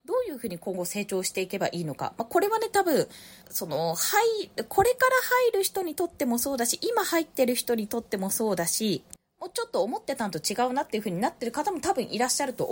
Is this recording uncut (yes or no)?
no